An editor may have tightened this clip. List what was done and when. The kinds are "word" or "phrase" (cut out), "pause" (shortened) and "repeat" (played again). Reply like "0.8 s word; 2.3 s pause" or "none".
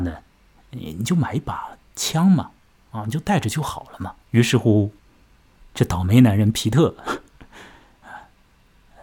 4.2 s pause

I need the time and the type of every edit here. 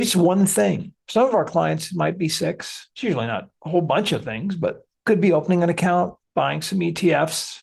none

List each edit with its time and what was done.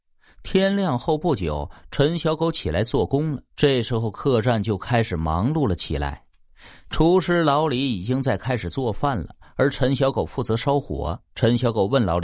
3.5 s pause; 11.3 s pause

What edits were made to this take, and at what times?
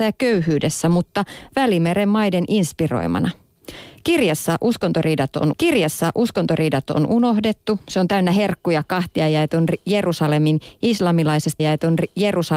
5.5 s repeat; 11.6 s repeat

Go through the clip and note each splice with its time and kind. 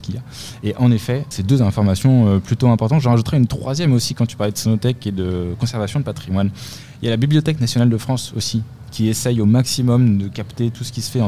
1.3 s word

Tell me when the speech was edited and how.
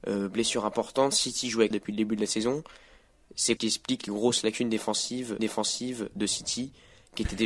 1.7 s phrase; 3.6 s phrase; 4.1 s word; 5.4 s repeat

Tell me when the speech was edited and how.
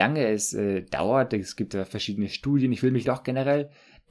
3.0 s phrase

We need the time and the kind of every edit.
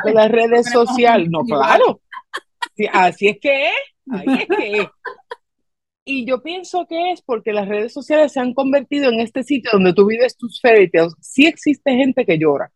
none

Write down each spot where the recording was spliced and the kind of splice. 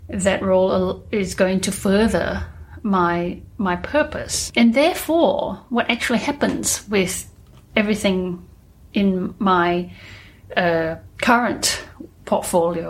none

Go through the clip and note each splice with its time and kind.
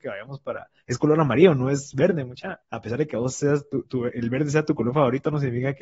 2.6 s pause

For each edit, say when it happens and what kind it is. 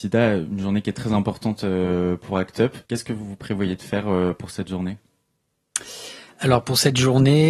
2.8 s pause

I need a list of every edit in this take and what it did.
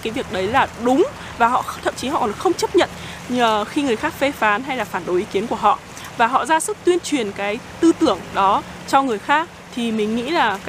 none

